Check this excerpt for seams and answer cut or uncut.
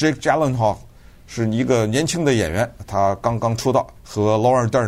cut